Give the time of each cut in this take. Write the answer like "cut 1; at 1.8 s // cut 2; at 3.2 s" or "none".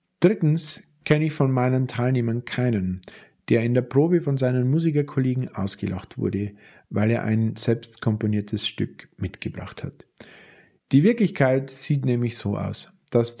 none